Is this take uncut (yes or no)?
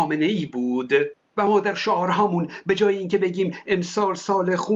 yes